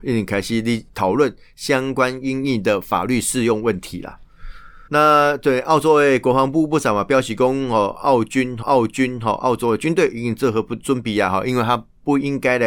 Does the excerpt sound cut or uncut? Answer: cut